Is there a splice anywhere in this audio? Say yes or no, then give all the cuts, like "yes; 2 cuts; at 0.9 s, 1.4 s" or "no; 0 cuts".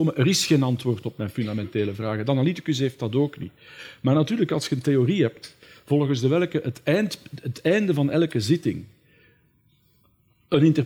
no; 0 cuts